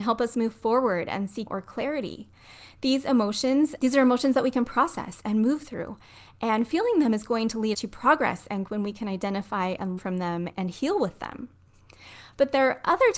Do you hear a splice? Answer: yes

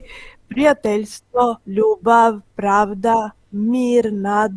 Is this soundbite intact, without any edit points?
no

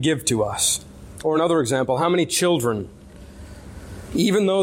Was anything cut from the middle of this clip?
no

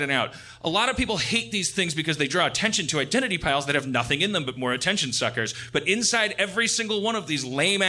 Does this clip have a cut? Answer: no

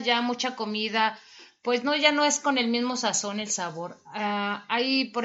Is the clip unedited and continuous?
yes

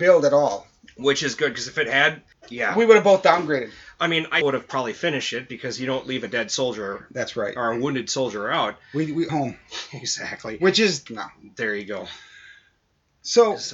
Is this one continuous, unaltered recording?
no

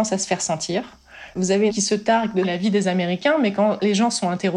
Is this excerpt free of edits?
no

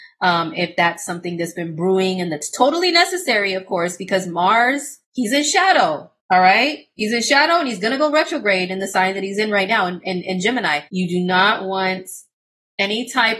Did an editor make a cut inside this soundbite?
yes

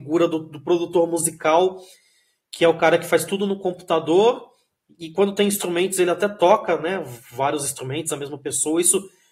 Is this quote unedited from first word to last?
yes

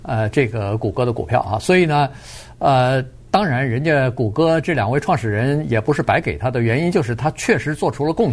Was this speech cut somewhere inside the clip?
no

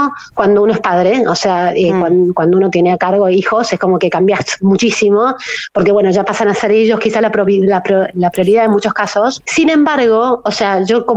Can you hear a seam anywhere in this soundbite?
no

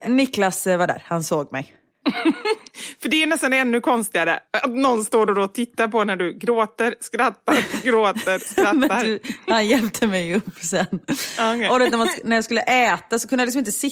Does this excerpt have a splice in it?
no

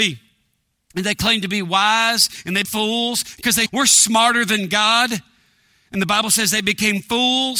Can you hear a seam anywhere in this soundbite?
yes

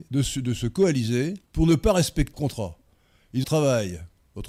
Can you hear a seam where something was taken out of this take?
yes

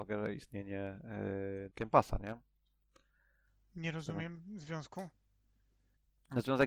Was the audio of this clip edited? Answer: yes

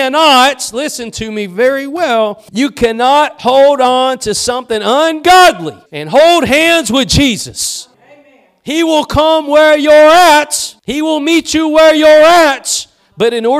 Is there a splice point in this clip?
yes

